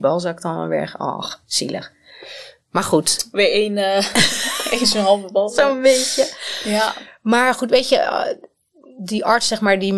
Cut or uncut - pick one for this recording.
uncut